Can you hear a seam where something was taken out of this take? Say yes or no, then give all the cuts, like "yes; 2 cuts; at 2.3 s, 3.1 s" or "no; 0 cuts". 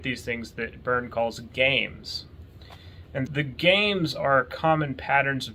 yes; 1 cut; at 3.3 s